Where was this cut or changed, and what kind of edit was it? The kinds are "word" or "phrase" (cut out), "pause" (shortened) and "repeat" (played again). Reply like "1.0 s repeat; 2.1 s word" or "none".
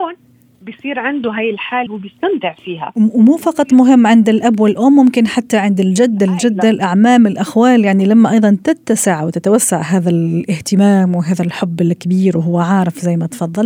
1.9 s word